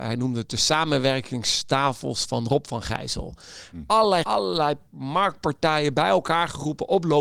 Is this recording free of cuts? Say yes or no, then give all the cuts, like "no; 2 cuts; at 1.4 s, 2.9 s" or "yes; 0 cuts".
no; 1 cut; at 4.2 s